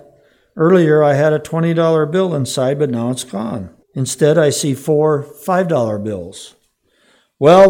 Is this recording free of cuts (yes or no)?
no